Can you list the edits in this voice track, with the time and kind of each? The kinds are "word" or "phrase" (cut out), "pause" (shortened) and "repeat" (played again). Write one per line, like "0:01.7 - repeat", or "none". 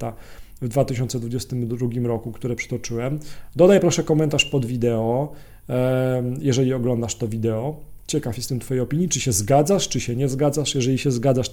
none